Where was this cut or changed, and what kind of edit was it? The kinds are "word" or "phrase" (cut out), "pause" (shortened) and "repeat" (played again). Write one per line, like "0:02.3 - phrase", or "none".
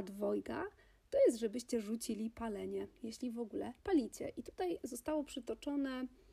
0:03.8 - pause